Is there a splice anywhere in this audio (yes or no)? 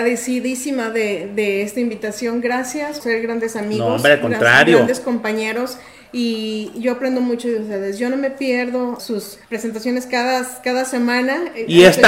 yes